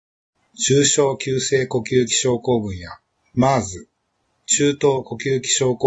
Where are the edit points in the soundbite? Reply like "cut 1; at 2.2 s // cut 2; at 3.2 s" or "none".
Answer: none